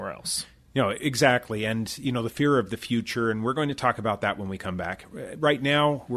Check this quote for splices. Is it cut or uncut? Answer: uncut